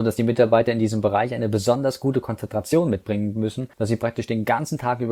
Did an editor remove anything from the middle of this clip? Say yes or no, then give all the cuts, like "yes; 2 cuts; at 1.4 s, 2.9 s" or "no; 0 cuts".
yes; 1 cut; at 3.7 s